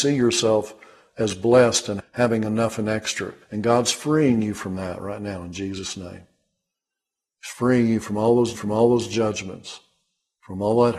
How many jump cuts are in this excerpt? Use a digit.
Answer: 3